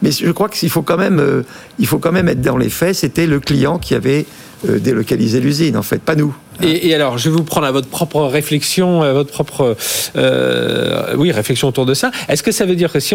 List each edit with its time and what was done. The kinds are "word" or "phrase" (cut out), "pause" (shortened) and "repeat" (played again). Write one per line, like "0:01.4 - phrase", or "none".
none